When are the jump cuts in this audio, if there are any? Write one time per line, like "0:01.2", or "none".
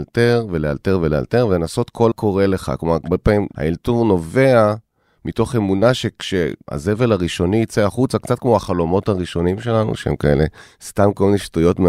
0:02.1